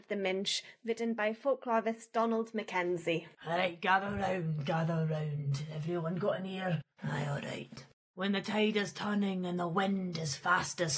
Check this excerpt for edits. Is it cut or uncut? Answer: cut